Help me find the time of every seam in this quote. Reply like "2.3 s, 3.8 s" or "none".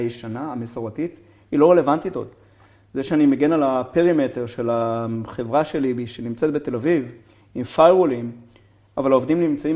none